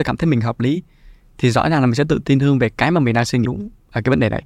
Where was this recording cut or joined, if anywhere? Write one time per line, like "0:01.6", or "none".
0:03.5